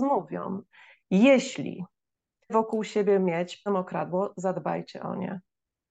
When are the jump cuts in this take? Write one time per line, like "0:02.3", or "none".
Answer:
0:02.5
0:03.7